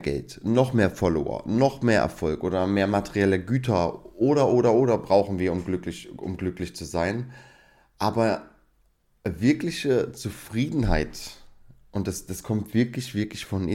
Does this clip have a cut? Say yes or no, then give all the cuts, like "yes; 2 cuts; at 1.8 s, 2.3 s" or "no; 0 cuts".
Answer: no; 0 cuts